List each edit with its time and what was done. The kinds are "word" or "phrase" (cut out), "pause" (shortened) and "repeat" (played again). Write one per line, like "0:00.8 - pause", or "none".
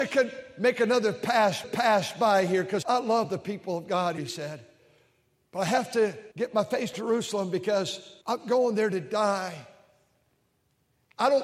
0:01.6 - repeat
0:02.8 - word
0:04.2 - word
0:06.3 - pause
0:06.9 - word
0:08.2 - pause